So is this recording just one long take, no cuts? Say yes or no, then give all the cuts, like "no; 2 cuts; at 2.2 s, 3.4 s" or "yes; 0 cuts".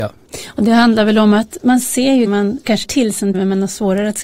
no; 4 cuts; at 1.6 s, 2.3 s, 2.8 s, 3.3 s